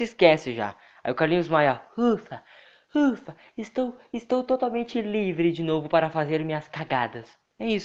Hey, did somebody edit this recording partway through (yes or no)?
no